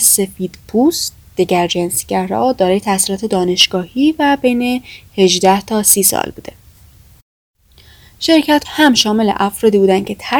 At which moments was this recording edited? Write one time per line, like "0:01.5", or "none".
0:08.6

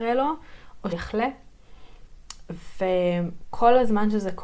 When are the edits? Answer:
0:00.9

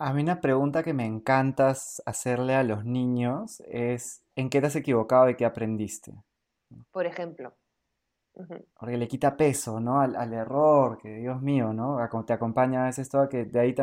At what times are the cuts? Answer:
0:04.3
0:06.9
0:08.7

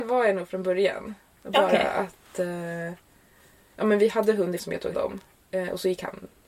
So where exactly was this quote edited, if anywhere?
0:04.6
0:04.9

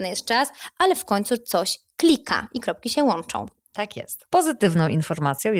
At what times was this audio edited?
none

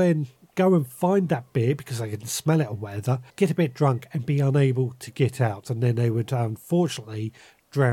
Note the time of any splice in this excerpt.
0:03.3

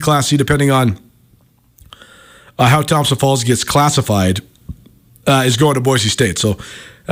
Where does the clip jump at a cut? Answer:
none

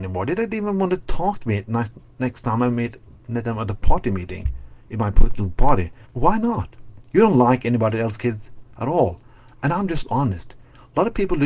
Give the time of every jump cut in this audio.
0:06.1

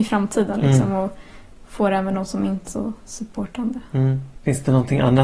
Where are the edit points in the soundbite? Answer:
0:02.7

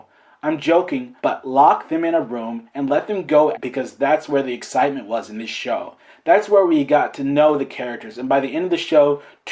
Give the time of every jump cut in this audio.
0:01.2
0:03.5

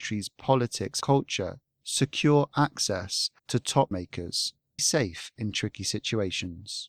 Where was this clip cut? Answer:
0:01.0
0:03.4
0:03.9
0:04.8

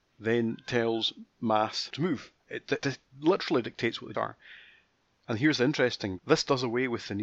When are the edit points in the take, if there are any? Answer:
0:01.9
0:02.8
0:04.1
0:06.2

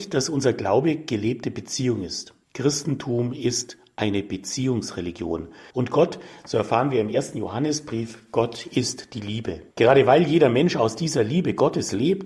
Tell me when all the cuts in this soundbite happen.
0:02.4
0:05.7
0:09.7

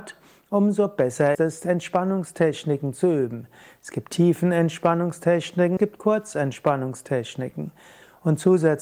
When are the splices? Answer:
0:01.3
0:05.8

